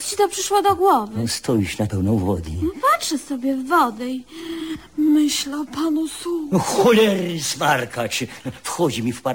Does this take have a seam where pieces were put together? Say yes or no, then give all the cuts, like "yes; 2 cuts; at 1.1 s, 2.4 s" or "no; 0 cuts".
yes; 1 cut; at 1.9 s